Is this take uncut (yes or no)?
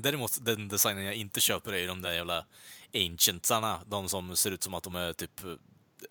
yes